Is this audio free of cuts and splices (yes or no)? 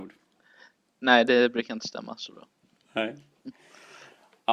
yes